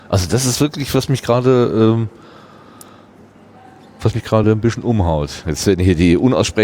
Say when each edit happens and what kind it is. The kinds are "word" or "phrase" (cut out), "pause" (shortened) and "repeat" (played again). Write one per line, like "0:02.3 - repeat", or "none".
none